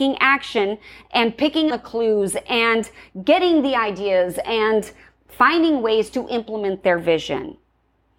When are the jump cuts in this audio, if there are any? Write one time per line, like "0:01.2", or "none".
0:01.7